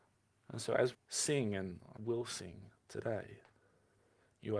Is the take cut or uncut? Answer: cut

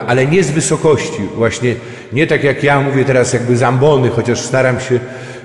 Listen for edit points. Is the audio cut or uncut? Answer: uncut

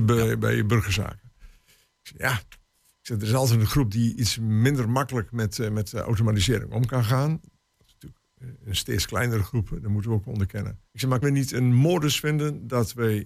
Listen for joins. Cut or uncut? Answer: cut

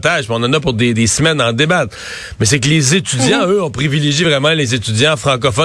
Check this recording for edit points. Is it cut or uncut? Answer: uncut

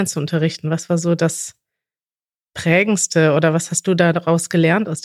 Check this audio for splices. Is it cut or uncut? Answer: uncut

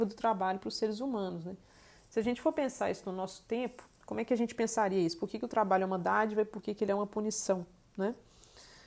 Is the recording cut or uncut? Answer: uncut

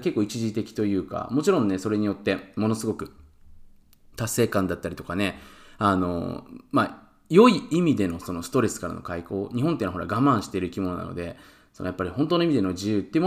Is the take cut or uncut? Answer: uncut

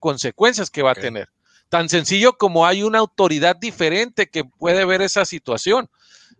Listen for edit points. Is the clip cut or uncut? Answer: uncut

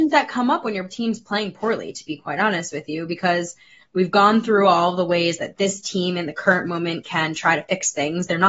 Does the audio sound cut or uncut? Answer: uncut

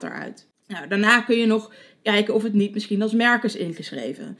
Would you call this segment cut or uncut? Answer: uncut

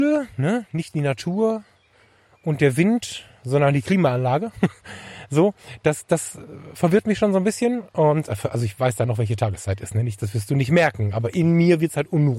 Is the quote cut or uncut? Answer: uncut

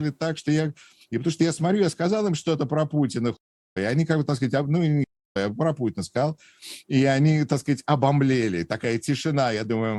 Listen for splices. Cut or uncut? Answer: uncut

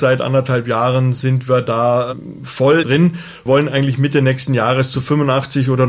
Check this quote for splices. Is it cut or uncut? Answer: cut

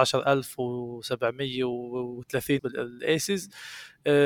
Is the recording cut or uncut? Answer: cut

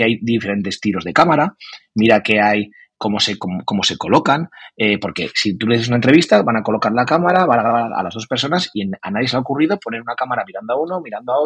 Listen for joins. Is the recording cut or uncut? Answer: uncut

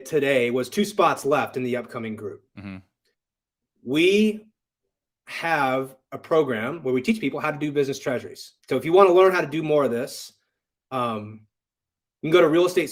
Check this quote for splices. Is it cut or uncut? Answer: cut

